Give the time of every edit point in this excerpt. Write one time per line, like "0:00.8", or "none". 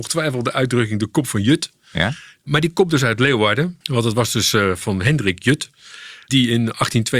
0:03.8